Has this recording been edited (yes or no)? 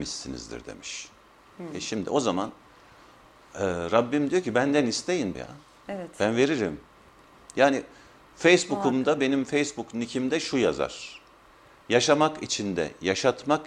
yes